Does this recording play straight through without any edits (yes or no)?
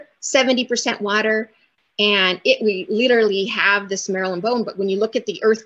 yes